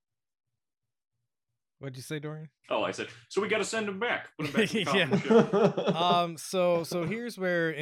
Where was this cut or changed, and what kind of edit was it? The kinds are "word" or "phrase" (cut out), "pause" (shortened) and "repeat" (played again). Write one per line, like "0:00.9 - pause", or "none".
0:02.6 - pause